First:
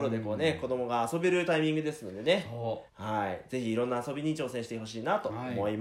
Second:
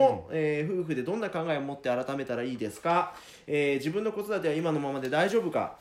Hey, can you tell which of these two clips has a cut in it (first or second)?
first